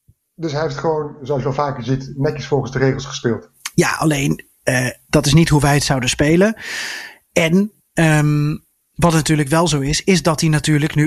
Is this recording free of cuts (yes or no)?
yes